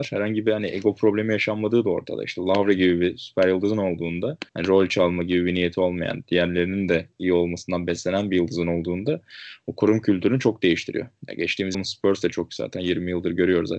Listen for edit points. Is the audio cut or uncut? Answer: cut